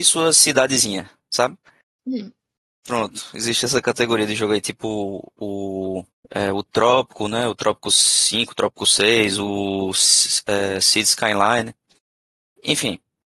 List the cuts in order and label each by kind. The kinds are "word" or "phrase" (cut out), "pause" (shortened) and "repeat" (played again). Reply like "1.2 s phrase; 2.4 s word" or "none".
6.1 s pause